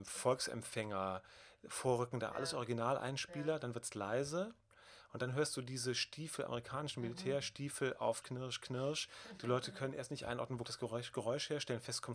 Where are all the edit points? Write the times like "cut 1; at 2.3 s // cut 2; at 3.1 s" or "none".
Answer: cut 1; at 2.3 s // cut 2; at 8.2 s // cut 3; at 10.6 s